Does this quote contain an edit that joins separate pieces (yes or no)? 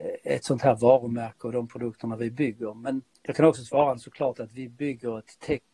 yes